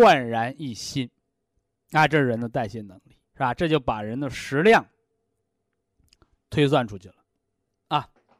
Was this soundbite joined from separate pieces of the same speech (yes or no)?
yes